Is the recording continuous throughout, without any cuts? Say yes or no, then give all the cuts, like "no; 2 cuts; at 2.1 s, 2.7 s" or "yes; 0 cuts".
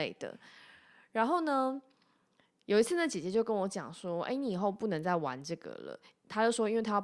yes; 0 cuts